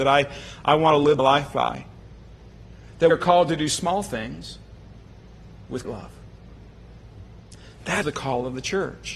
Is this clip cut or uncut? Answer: cut